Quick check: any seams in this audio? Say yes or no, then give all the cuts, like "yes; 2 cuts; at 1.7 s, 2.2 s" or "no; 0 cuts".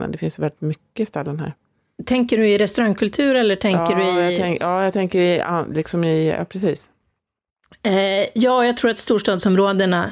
no; 0 cuts